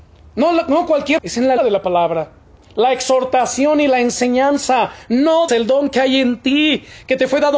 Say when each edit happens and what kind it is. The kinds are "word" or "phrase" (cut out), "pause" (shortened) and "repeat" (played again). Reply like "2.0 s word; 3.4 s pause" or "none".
1.2 s word; 1.6 s word; 2.4 s pause; 5.5 s word